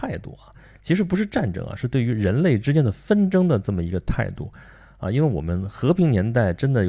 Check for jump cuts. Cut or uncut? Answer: uncut